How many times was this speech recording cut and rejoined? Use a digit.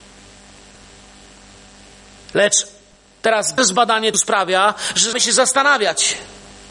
3